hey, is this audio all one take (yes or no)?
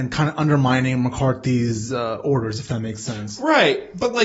yes